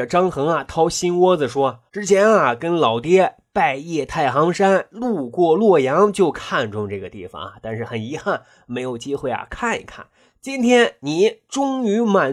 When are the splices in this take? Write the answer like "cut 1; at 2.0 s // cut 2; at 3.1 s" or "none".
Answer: cut 1; at 1.9 s